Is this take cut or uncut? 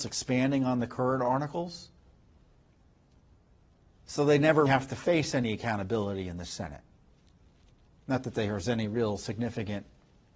cut